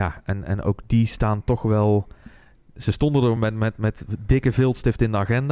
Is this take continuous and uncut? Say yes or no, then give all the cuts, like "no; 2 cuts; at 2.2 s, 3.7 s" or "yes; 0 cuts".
yes; 0 cuts